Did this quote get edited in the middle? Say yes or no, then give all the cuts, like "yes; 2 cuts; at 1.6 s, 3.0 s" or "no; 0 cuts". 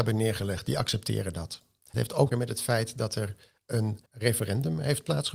yes; 3 cuts; at 1.9 s, 2.3 s, 4.1 s